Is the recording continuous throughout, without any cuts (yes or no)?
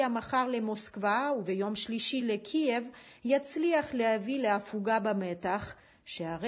yes